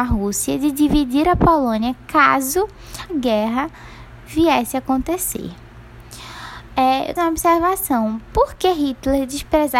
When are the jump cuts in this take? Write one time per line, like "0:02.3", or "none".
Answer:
0:03.1
0:07.2